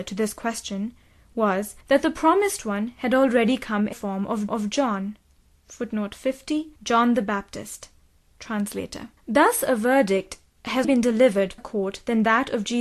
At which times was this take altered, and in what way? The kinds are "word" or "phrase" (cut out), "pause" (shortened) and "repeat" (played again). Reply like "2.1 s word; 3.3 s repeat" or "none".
1.8 s pause; 3.9 s word; 4.5 s repeat; 6.8 s pause; 9.2 s pause; 10.8 s word; 11.6 s phrase